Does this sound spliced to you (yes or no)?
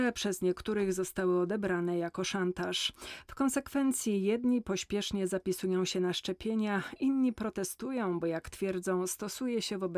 no